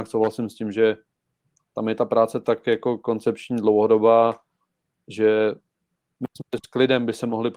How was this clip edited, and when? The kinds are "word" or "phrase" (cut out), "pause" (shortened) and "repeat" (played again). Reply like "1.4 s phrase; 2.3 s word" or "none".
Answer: none